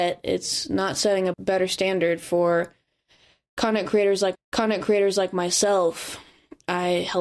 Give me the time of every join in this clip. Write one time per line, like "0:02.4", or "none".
0:01.3
0:04.3